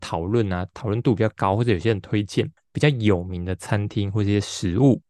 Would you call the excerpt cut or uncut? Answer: uncut